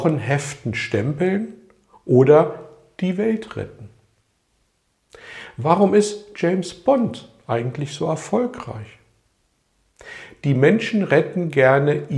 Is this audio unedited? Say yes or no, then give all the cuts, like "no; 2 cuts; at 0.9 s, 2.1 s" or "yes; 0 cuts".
yes; 0 cuts